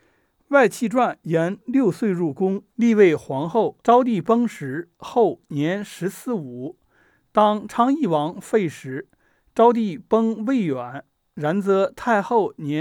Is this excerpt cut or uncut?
cut